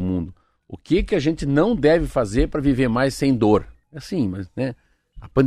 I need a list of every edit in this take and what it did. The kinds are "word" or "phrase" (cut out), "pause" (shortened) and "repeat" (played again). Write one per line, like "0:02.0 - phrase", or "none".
none